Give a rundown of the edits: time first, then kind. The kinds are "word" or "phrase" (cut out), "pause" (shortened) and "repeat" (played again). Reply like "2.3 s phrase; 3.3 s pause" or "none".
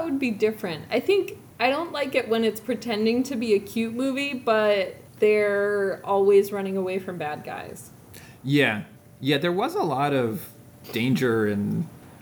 none